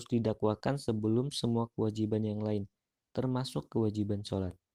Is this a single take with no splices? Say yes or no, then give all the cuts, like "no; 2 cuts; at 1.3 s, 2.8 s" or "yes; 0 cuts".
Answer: yes; 0 cuts